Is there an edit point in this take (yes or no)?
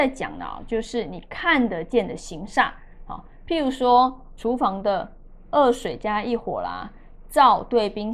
yes